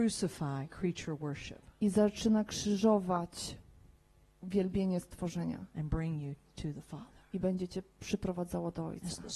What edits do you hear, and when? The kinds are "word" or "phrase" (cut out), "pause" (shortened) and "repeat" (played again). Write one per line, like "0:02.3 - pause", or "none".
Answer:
none